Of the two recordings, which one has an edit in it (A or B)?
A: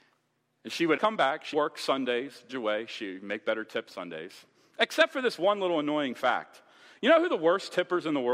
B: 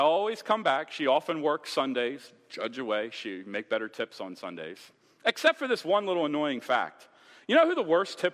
A